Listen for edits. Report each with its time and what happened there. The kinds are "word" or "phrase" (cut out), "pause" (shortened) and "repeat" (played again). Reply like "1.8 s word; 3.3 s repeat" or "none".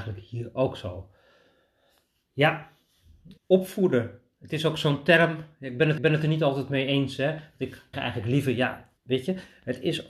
3.4 s pause; 6.0 s repeat; 7.9 s word; 9.0 s pause